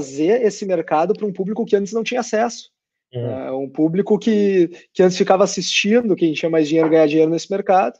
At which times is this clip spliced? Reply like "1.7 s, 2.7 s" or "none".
none